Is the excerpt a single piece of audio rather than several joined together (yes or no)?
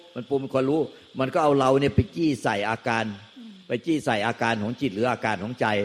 no